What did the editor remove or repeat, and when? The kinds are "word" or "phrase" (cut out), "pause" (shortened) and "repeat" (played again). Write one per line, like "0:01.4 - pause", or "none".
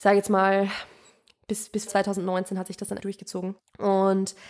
0:01.9 - word
0:03.0 - word
0:03.6 - pause

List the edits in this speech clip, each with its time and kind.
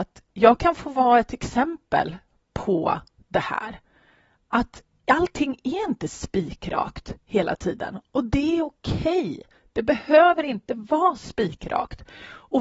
none

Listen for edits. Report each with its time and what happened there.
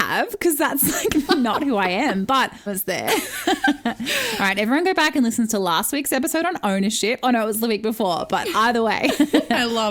0:02.7 - phrase

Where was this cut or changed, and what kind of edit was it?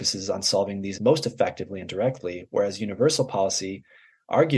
0:01.0 - word

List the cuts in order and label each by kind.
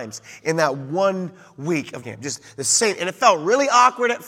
0:02.0 - word

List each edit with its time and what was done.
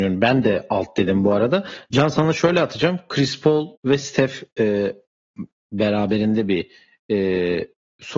0:03.7 - pause

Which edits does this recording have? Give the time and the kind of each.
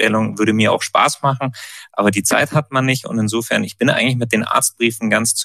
none

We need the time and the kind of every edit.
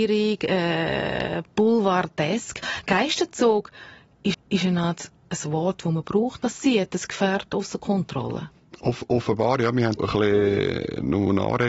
0:04.3 - repeat
0:06.4 - phrase
0:10.0 - phrase

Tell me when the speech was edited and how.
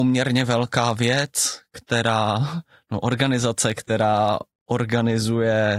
none

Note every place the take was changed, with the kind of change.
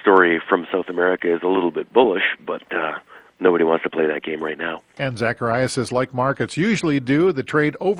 none

